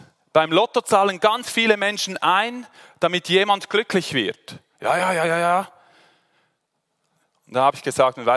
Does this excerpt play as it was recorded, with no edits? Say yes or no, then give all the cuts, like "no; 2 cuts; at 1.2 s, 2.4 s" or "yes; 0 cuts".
yes; 0 cuts